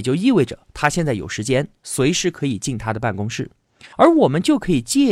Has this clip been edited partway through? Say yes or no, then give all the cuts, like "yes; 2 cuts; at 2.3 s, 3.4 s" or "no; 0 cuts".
yes; 1 cut; at 3.9 s